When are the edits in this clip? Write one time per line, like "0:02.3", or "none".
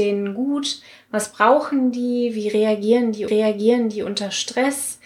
0:03.3